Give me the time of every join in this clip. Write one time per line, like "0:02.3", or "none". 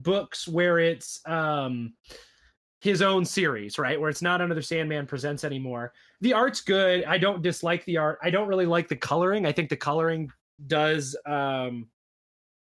none